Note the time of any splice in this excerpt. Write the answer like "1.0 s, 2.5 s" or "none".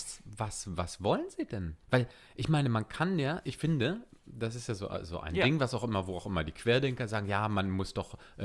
1.8 s

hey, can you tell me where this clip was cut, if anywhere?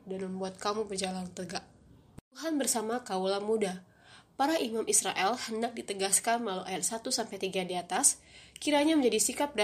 2.3 s

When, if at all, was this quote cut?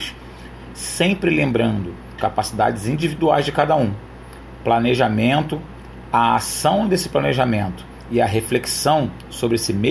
2.2 s

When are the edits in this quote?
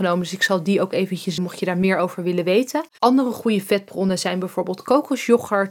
1.4 s, 2.9 s

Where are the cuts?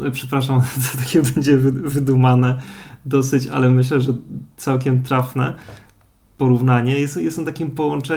none

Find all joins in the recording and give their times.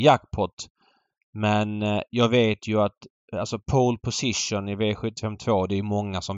none

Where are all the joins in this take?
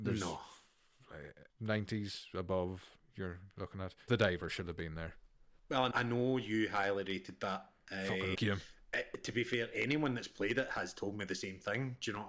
1.5 s, 4.1 s, 5.9 s, 8.3 s

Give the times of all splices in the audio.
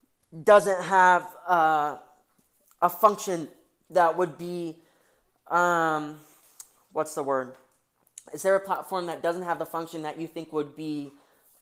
none

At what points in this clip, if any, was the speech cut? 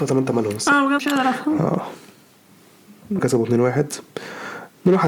1.0 s, 3.2 s

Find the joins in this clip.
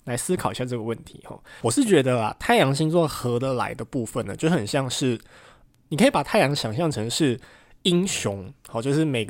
none

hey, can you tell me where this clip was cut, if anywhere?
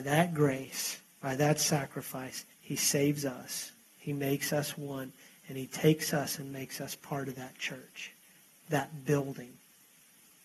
2.5 s, 3.8 s

